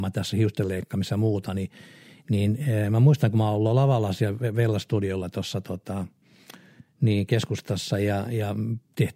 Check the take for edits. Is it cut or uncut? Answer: uncut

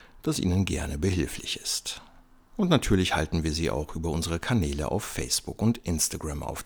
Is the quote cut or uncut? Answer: uncut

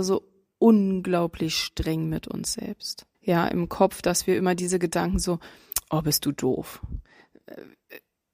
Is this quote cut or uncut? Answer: cut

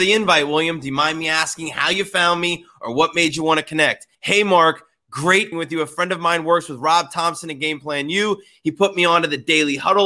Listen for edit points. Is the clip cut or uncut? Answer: cut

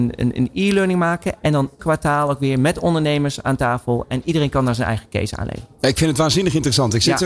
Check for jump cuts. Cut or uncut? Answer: cut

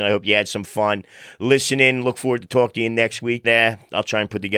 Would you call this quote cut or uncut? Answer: cut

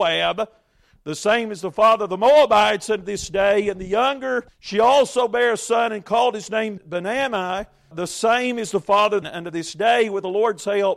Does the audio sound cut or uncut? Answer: cut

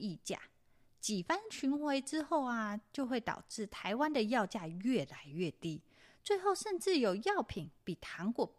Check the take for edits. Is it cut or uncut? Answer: uncut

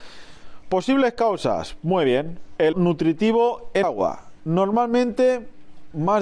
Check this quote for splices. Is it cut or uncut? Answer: cut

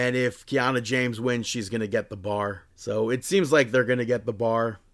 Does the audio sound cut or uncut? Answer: cut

